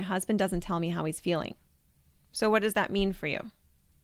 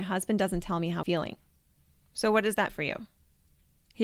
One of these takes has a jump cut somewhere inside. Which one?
second; 2 cuts; at 1.0 s, 2.7 s

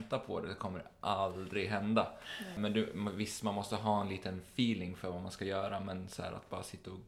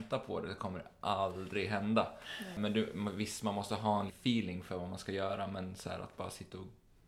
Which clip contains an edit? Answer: second; 1 cut; at 4.1 s

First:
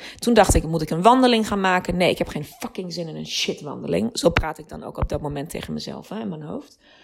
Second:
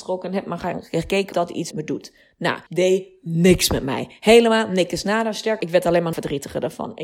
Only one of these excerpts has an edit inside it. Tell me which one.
second; 5 cuts; at 1.3 s, 1.7 s, 2.7 s, 5.6 s, 6.1 s

